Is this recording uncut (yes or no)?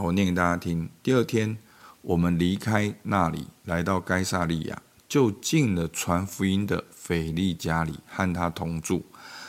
yes